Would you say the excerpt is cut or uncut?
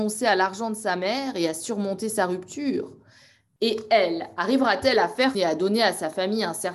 cut